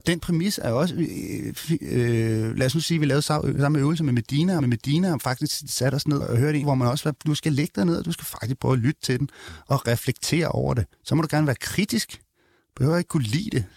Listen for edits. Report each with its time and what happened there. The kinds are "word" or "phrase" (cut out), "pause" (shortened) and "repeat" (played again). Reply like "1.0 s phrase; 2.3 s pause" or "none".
4.6 s repeat; 6.2 s word; 6.6 s phrase; 10.9 s pause